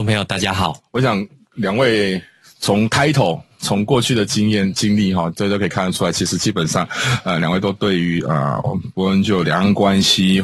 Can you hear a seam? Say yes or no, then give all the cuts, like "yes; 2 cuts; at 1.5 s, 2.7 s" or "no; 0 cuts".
no; 0 cuts